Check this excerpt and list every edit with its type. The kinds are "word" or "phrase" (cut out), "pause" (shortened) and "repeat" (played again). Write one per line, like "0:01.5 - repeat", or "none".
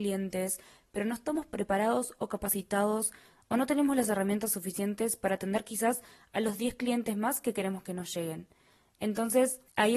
none